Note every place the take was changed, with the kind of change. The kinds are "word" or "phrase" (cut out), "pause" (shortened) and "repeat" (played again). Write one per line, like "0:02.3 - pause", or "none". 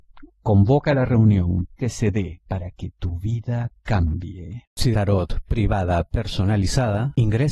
0:01.8 - word
0:02.4 - pause
0:04.9 - phrase